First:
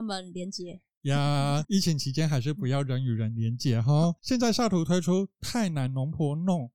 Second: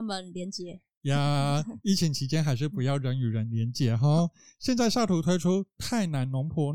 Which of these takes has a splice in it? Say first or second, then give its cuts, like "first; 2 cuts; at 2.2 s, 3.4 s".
first; 2 cuts; at 1.6 s, 4.2 s